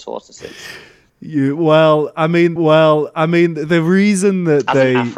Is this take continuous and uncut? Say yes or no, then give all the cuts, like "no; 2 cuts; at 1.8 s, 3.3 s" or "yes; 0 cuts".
no; 1 cut; at 2.6 s